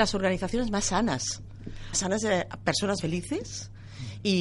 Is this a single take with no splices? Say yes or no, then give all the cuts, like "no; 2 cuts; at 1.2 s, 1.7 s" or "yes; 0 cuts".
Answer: no; 2 cuts; at 1.9 s, 3.0 s